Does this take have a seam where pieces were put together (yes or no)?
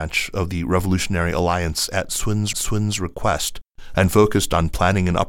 yes